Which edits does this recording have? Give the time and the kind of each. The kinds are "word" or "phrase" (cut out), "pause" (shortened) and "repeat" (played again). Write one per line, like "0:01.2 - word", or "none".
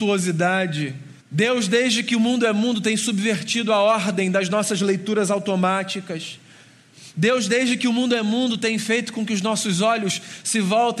0:01.2 - pause